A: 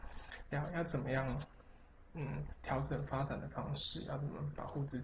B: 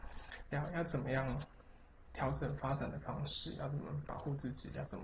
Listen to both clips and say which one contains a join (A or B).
B